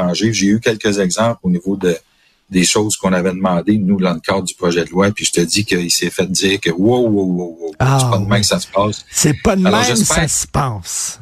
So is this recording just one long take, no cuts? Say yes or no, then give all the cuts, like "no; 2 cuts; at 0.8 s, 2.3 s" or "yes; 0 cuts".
yes; 0 cuts